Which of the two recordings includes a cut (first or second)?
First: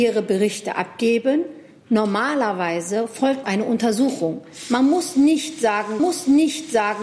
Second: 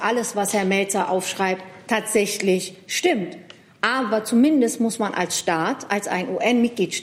first